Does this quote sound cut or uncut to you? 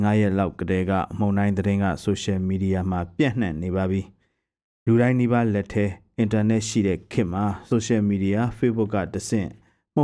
uncut